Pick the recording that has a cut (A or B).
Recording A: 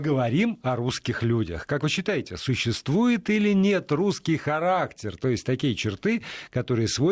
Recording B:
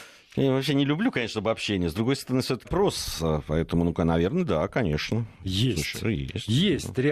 B